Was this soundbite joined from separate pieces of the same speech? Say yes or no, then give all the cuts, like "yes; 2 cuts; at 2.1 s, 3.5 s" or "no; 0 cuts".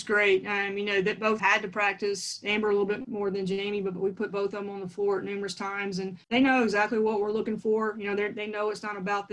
yes; 3 cuts; at 1.4 s, 3.0 s, 6.2 s